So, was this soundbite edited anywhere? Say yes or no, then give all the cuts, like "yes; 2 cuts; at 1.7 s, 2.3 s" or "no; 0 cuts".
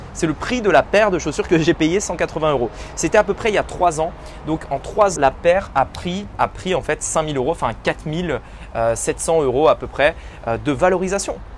yes; 2 cuts; at 5.2 s, 6.3 s